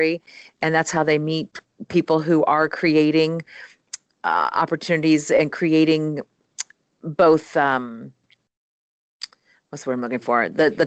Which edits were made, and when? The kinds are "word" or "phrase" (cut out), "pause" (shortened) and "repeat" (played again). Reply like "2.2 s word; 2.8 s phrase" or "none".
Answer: none